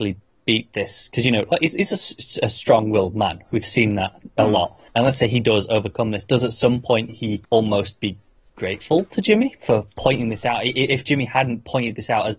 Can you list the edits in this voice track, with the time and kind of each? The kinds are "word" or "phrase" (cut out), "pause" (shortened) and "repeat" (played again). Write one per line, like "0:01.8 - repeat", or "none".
0:04.9 - pause
0:07.4 - pause